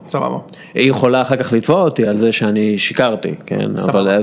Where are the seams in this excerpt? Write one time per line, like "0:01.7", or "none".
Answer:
none